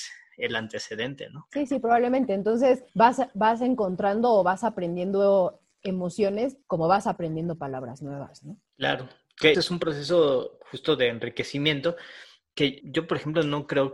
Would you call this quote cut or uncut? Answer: cut